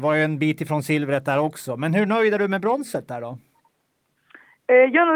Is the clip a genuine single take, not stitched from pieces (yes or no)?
yes